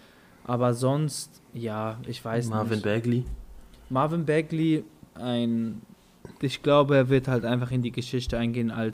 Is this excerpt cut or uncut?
uncut